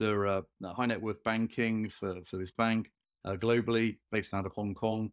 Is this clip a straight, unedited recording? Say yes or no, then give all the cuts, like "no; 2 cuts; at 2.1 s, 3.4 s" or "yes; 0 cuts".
yes; 0 cuts